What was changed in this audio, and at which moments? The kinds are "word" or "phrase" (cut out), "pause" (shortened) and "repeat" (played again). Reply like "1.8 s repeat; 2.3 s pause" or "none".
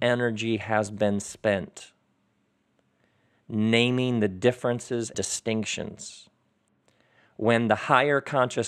5.1 s word